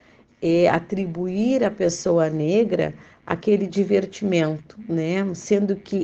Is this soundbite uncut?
yes; 0 cuts

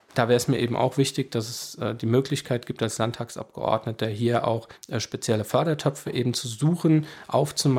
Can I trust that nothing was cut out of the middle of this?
no; 1 cut; at 4.8 s

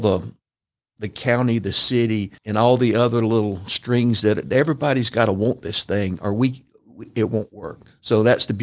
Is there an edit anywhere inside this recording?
yes; 1 cut; at 2.4 s

